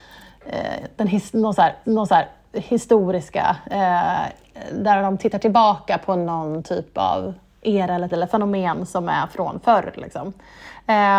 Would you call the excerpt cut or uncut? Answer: cut